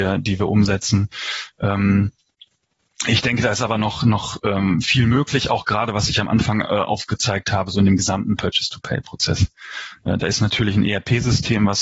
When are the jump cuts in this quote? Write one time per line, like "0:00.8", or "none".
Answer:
none